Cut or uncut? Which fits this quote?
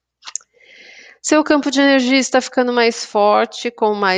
uncut